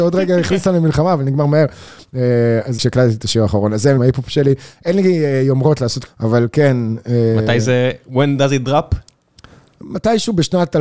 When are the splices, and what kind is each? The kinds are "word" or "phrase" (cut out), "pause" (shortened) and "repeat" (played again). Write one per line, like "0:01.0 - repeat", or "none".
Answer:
0:02.8 - word
0:04.0 - phrase
0:06.0 - phrase